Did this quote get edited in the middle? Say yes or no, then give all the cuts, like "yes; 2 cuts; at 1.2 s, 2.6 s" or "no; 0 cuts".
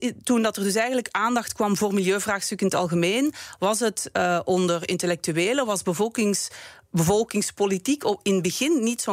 no; 0 cuts